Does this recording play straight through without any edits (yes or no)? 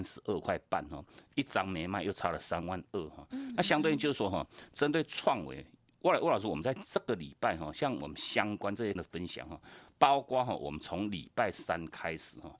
no